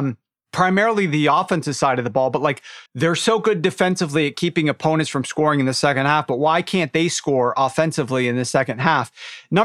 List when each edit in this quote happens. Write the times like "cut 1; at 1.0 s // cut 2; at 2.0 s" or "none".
cut 1; at 2.9 s